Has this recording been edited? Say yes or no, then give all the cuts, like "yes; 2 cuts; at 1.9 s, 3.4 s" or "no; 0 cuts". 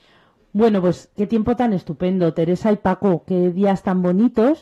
yes; 1 cut; at 1.2 s